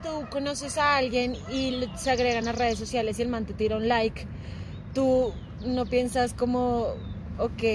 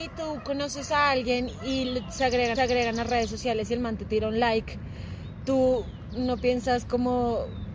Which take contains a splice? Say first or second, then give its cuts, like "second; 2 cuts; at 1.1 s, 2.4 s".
second; 1 cut; at 2.5 s